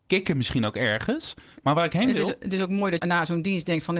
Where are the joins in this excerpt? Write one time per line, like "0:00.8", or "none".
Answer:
0:03.0